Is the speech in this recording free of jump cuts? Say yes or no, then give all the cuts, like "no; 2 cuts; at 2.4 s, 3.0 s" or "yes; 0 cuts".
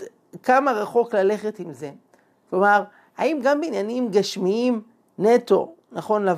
yes; 0 cuts